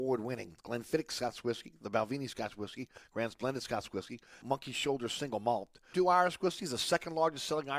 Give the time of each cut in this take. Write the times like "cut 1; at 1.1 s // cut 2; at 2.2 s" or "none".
cut 1; at 4.4 s // cut 2; at 5.9 s